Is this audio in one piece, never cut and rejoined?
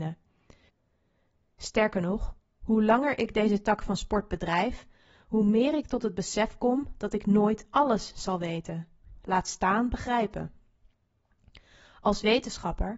yes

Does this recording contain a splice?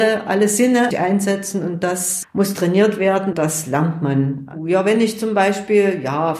yes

